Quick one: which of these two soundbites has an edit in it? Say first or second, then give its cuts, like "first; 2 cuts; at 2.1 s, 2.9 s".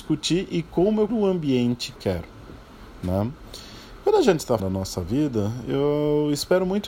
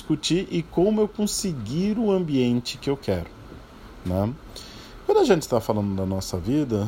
first; 3 cuts; at 1.1 s, 2.0 s, 4.6 s